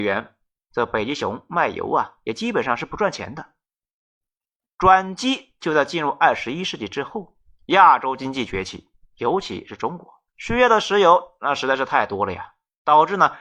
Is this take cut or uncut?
cut